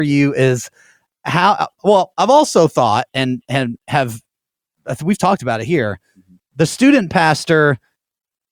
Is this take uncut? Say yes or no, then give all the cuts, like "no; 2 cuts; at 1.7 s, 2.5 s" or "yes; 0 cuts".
yes; 0 cuts